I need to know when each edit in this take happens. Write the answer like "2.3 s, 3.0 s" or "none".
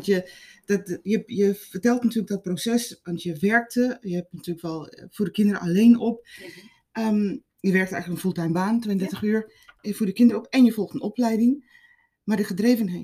none